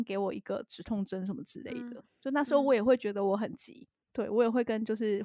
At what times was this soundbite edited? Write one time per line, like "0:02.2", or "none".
0:04.0